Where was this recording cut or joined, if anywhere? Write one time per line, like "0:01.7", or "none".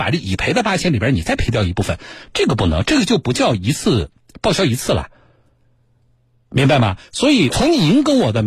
0:07.5